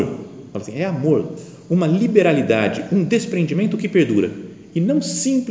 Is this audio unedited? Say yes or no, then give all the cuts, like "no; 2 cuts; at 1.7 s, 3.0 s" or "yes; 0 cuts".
yes; 0 cuts